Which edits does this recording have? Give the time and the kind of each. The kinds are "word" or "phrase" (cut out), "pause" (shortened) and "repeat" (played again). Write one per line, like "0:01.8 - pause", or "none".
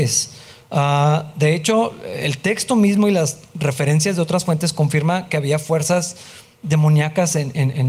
none